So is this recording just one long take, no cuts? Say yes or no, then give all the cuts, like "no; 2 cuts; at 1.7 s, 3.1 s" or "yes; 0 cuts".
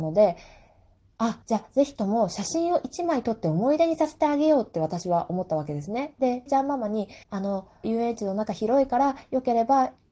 no; 4 cuts; at 1.4 s, 6.5 s, 7.2 s, 7.8 s